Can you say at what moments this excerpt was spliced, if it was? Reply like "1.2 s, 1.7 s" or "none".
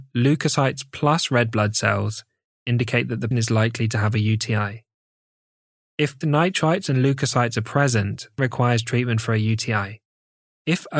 3.3 s, 6.2 s, 8.4 s